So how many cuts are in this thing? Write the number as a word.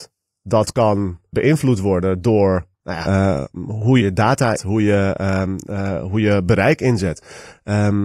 five